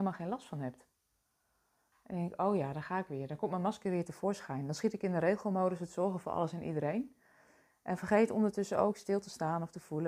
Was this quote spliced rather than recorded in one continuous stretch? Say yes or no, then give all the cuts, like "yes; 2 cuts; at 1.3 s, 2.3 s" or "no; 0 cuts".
no; 0 cuts